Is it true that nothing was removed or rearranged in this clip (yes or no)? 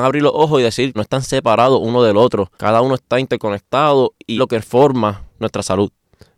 no